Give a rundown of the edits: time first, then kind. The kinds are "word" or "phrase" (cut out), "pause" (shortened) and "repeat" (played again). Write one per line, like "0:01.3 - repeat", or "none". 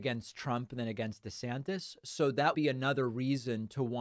0:02.5 - word